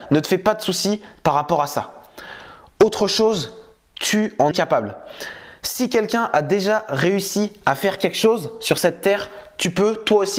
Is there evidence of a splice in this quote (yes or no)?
yes